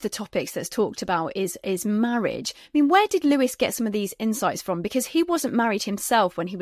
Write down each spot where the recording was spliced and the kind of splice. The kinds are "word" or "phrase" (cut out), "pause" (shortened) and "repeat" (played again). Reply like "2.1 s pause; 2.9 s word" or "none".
none